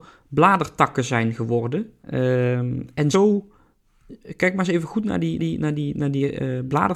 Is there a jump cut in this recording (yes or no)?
yes